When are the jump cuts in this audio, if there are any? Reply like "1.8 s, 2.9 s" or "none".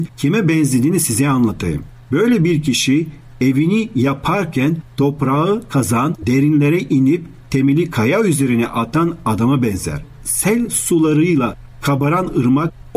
none